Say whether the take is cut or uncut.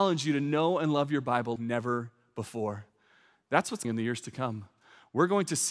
cut